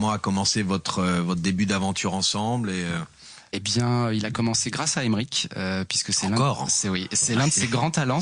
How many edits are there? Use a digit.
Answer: 0